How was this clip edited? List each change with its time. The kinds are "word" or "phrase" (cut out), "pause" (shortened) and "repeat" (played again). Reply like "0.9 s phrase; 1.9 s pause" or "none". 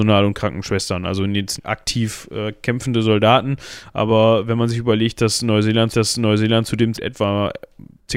1.6 s word; 5.9 s repeat; 6.9 s word